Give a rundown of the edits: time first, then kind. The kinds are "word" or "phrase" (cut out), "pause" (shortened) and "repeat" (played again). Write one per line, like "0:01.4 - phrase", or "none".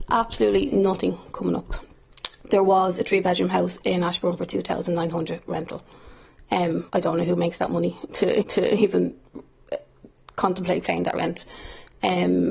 0:06.9 - pause
0:08.4 - repeat

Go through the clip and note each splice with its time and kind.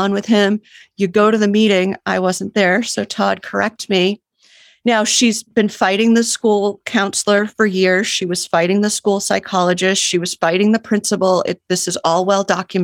none

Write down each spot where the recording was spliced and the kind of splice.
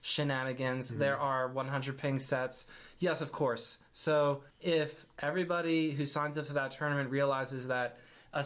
0:04.5 - pause

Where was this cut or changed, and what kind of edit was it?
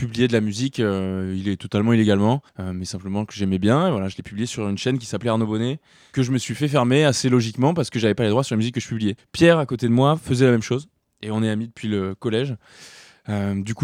0:02.5 - pause

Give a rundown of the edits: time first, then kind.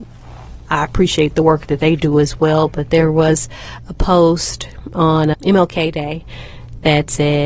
0:05.3 - word

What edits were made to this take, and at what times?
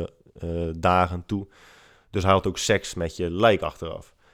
none

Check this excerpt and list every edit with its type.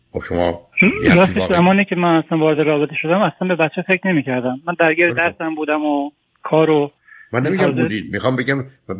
none

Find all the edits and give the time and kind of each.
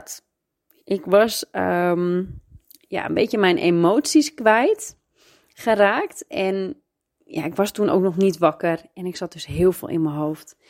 none

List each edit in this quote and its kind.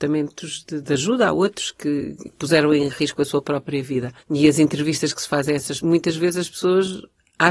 0:04.2 - pause
0:05.8 - word

